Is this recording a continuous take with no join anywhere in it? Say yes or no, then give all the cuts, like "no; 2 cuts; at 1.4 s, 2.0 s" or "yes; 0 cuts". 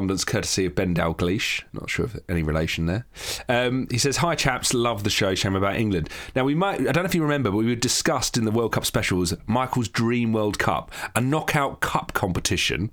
no; 1 cut; at 1.7 s